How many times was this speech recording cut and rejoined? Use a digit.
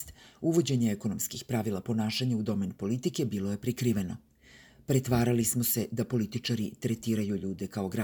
0